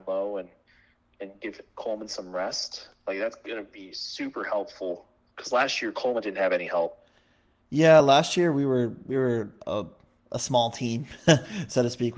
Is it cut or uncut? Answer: uncut